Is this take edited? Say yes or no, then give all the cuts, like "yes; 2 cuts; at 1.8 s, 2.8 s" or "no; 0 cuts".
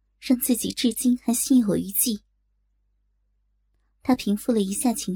no; 0 cuts